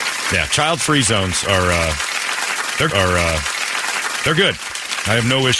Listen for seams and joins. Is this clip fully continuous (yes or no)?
no